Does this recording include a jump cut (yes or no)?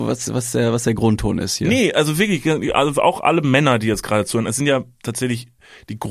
no